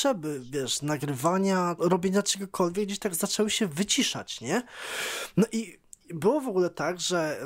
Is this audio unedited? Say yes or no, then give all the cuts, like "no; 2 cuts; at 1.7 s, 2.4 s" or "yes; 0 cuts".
no; 1 cut; at 1.8 s